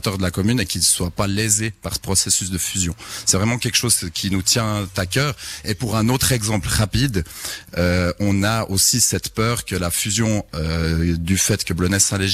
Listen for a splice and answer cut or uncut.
uncut